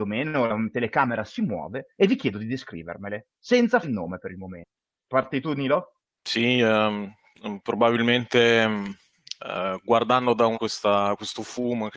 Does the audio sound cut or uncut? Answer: cut